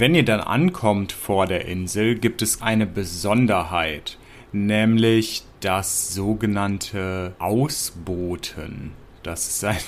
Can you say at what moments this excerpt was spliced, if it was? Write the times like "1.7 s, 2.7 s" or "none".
2.6 s, 4.3 s, 7.4 s